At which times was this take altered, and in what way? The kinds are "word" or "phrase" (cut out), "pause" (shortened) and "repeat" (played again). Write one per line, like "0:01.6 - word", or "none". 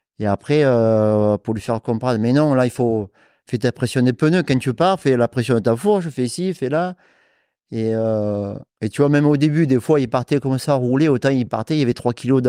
0:08.7 - pause

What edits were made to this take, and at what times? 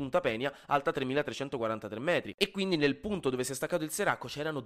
none

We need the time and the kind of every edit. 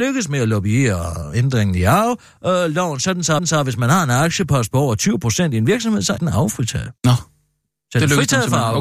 0:03.4 - repeat
0:06.2 - word
0:07.0 - pause

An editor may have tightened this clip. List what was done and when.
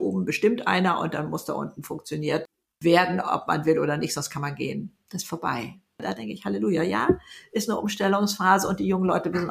none

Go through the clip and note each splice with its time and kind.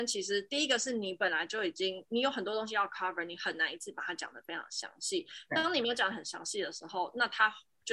none

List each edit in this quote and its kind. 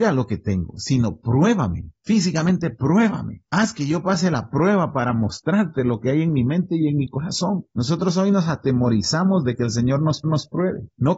0:10.2 - repeat

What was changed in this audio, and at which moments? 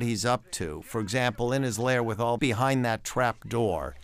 0:02.4 - phrase

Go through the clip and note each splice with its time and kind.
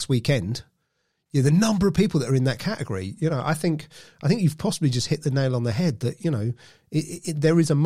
none

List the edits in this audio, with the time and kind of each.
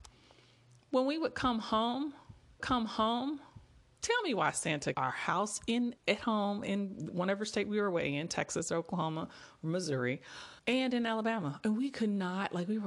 0:02.6 - repeat
0:04.9 - phrase
0:06.0 - pause
0:10.6 - pause

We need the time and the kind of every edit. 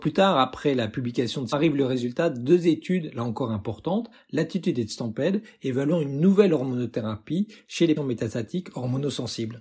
0:01.5 - word
0:08.0 - word

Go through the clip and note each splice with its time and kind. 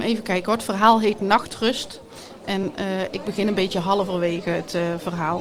none

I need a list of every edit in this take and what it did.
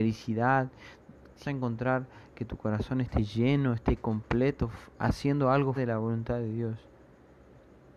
0:01.4 - word
0:05.8 - word

